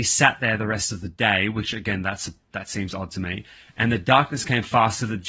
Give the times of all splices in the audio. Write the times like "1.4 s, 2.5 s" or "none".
none